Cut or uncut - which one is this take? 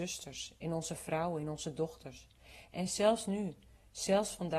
uncut